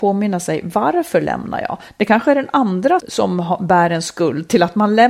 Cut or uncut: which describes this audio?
cut